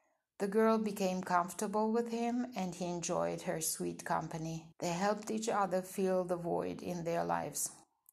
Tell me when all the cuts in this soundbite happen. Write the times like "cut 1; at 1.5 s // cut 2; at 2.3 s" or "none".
cut 1; at 4.7 s